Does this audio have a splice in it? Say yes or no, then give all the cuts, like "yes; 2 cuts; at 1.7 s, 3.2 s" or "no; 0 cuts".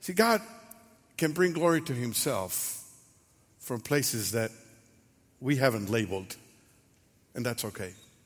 no; 0 cuts